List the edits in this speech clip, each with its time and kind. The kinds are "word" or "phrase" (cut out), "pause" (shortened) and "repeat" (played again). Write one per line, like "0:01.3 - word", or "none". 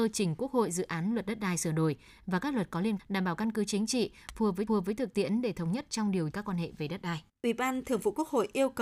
0:03.0 - word
0:04.7 - repeat
0:06.3 - word
0:07.3 - pause